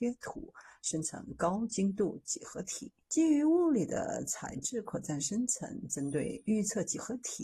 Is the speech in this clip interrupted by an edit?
yes; 1 cut; at 3.0 s

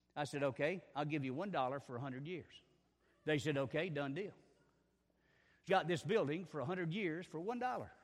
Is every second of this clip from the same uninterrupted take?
no; 2 cuts; at 3.0 s, 5.7 s

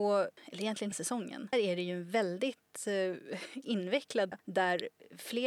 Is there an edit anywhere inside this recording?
yes; 3 cuts; at 0.9 s, 1.5 s, 4.3 s

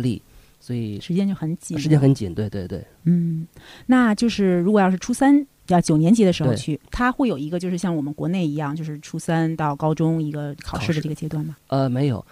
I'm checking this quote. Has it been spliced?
no; 0 cuts

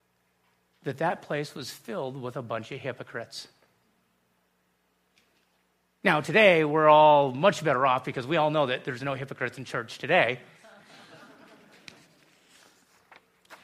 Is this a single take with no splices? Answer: yes; 0 cuts

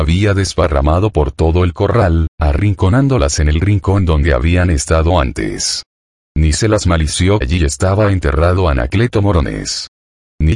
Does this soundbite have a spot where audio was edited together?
yes; 1 cut; at 7.4 s

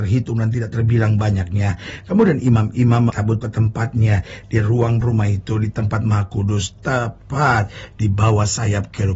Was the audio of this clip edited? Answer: yes; 3 cuts; at 3.1 s, 3.4 s, 5.0 s

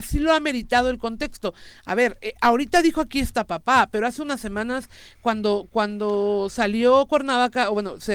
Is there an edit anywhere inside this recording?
no; 0 cuts

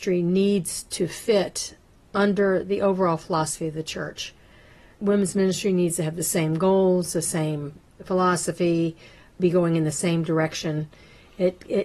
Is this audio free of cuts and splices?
yes; 0 cuts

